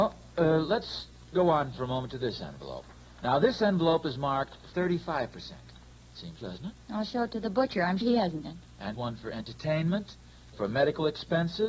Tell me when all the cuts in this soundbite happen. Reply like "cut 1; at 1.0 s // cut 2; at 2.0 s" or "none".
cut 1; at 4.7 s // cut 2; at 6.4 s // cut 3; at 8.0 s // cut 4; at 8.4 s // cut 5; at 8.9 s // cut 6; at 10.5 s